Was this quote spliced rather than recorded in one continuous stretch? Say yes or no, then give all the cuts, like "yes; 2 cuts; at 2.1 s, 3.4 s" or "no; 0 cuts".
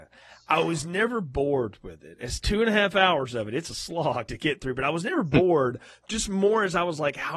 no; 0 cuts